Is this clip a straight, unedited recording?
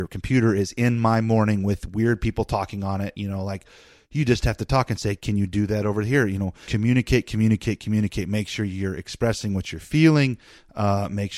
no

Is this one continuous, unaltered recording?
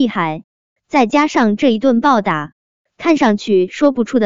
yes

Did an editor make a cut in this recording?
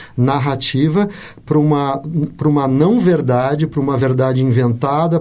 no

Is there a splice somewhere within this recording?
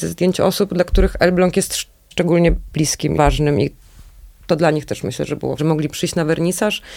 yes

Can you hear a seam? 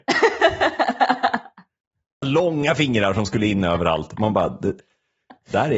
yes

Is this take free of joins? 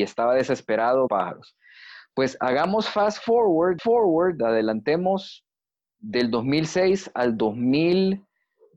no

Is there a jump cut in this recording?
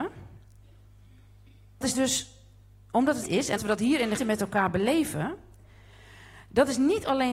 yes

